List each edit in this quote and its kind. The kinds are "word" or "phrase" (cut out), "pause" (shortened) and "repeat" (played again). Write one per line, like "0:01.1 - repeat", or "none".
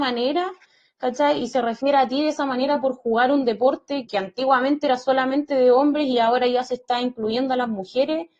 0:04.1 - word